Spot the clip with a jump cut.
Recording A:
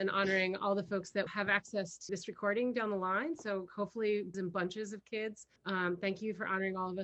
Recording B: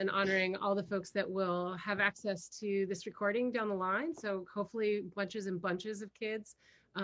A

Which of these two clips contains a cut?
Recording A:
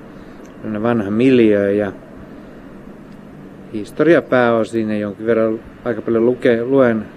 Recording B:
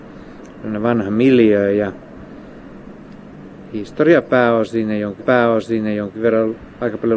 B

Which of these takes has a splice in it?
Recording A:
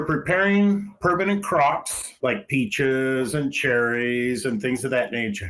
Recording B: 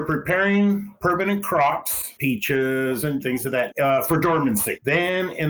B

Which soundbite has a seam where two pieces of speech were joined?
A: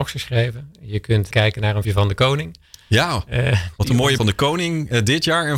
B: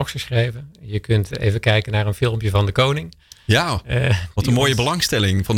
A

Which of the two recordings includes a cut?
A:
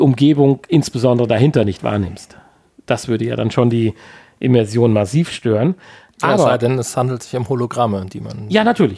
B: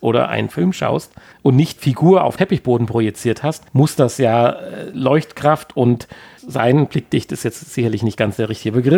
B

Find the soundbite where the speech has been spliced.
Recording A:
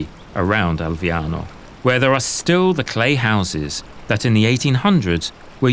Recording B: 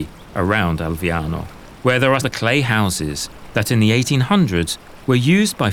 B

